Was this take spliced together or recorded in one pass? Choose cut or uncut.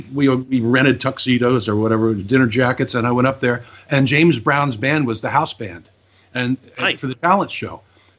uncut